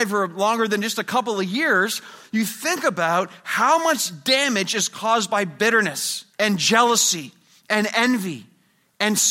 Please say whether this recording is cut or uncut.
cut